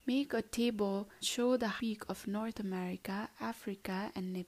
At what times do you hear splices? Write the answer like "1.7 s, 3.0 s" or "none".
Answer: 1.2 s, 1.8 s, 2.5 s